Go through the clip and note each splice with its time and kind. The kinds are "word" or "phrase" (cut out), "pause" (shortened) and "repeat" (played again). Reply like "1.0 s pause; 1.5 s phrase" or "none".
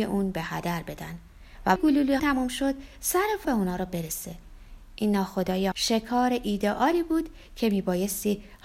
1.8 s phrase; 2.2 s word; 3.4 s phrase; 5.7 s word